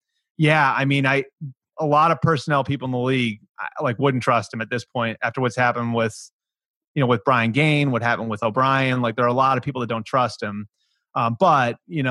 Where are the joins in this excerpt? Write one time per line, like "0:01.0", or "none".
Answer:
none